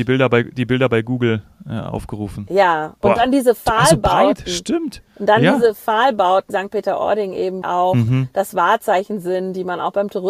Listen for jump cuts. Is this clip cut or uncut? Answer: cut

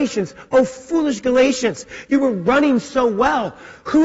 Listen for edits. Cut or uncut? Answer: uncut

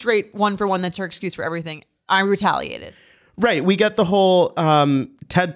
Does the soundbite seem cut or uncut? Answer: uncut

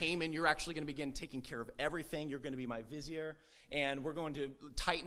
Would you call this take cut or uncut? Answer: uncut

